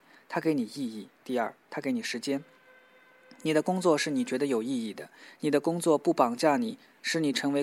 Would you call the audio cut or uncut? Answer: cut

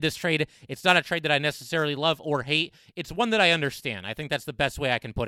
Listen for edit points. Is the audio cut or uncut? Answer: uncut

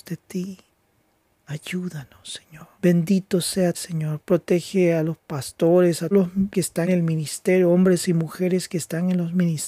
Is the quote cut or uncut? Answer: cut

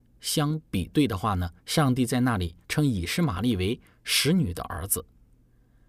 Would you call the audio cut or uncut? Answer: cut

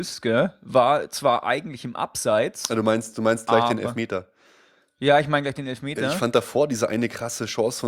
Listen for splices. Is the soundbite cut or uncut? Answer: uncut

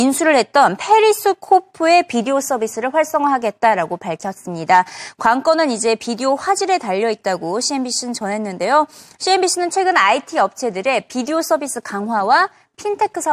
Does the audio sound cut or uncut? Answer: uncut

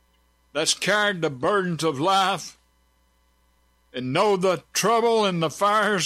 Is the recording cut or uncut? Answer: uncut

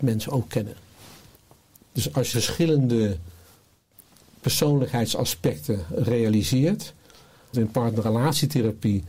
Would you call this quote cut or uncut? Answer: cut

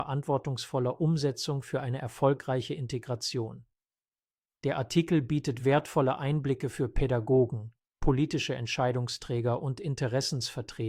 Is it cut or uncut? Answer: uncut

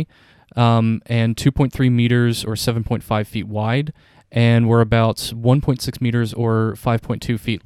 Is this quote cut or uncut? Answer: uncut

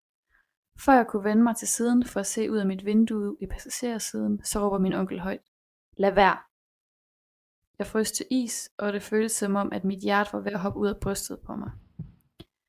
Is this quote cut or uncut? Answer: uncut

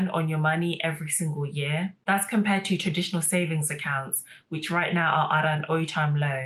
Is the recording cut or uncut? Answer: uncut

